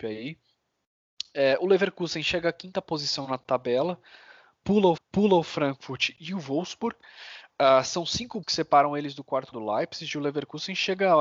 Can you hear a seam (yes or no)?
yes